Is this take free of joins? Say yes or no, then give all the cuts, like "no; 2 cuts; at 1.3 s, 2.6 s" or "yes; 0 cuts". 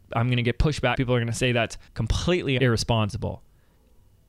no; 2 cuts; at 1.0 s, 1.9 s